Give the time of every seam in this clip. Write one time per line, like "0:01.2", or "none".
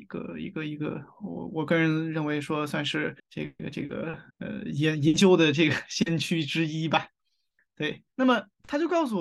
0:03.2
0:04.3
0:08.1